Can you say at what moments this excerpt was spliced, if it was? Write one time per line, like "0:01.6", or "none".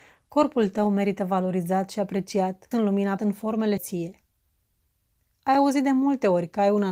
0:02.7
0:03.2
0:03.8